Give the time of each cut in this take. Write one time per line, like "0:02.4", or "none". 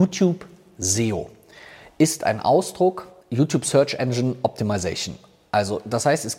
0:03.2